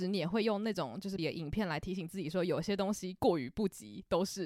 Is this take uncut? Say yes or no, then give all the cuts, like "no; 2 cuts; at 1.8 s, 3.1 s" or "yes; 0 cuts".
no; 1 cut; at 1.2 s